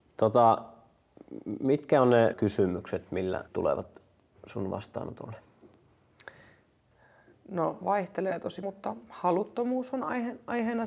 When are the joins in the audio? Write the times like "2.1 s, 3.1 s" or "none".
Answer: 2.3 s, 3.5 s, 7.8 s, 8.6 s